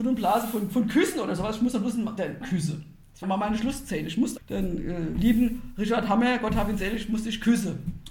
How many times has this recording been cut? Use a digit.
3